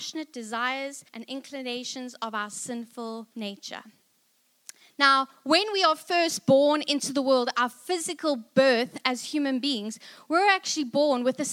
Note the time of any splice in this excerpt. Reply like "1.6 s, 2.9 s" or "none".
1.1 s, 3.3 s